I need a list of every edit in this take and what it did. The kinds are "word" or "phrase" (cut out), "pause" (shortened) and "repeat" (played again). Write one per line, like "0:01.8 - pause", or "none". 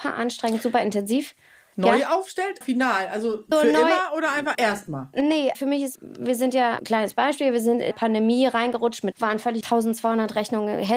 0:02.6 - word
0:03.5 - word
0:04.5 - word
0:05.5 - word
0:05.9 - word
0:06.8 - word
0:07.9 - word
0:09.1 - word
0:09.6 - word